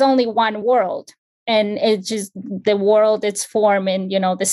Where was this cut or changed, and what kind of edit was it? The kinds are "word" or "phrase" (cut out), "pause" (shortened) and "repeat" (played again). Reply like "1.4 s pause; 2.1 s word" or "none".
none